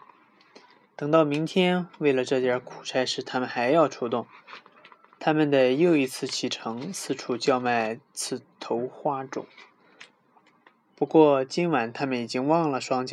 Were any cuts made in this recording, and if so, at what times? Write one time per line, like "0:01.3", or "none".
none